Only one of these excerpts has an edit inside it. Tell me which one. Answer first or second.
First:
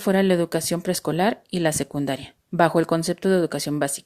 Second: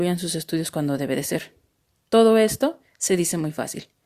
first